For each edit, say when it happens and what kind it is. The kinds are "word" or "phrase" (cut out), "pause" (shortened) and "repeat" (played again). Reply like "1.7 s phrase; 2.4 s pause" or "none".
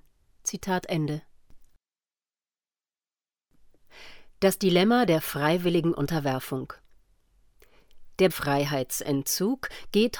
4.3 s pause; 8.3 s word